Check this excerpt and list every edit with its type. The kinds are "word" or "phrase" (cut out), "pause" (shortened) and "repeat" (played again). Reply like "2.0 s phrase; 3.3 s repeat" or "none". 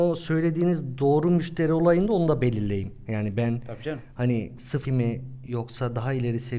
4.8 s word